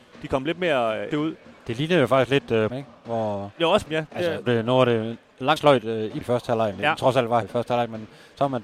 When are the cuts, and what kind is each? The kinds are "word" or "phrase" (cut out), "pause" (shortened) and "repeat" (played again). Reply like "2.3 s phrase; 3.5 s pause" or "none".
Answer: 1.1 s word; 2.7 s word; 3.9 s word; 4.5 s word; 5.6 s word; 6.2 s word; 7.4 s word